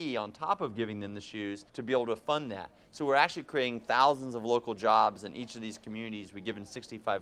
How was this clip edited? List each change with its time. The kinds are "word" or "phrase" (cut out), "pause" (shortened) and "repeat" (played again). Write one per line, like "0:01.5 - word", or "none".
0:01.7 - pause